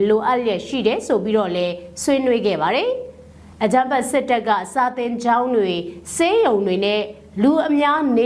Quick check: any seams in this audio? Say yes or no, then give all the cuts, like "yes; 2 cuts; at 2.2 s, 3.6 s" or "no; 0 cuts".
no; 0 cuts